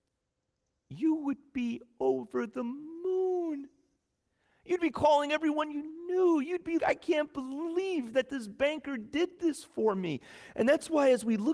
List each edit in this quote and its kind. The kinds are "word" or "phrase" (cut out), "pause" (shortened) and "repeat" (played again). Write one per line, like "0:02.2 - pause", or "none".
0:06.8 - word